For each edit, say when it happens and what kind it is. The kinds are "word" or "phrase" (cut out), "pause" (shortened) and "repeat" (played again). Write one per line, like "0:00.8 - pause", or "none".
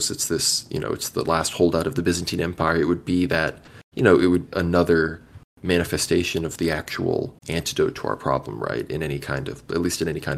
0:03.8 - pause
0:04.5 - word
0:07.4 - pause